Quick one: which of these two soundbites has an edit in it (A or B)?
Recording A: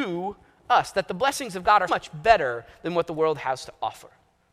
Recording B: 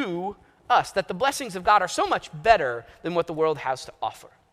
A